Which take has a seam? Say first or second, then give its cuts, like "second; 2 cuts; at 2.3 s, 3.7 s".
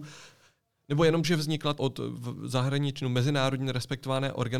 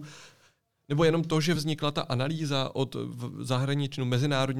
first; 2 cuts; at 1.2 s, 1.8 s